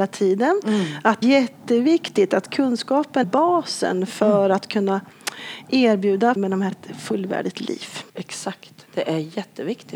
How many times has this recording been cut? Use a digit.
5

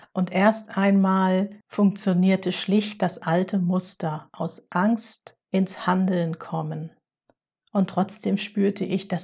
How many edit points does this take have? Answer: 3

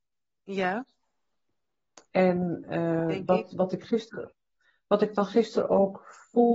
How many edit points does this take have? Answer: 0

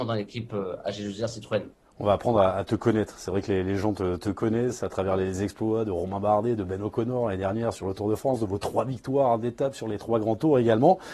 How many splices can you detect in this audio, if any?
0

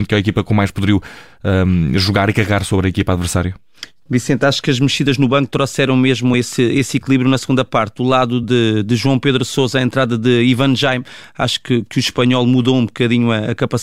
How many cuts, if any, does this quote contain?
0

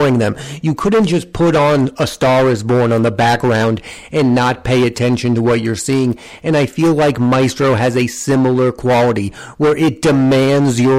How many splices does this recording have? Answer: 0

